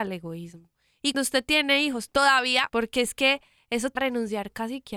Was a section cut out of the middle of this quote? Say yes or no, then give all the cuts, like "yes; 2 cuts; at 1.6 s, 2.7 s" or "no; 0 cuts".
yes; 3 cuts; at 1.1 s, 2.7 s, 4.0 s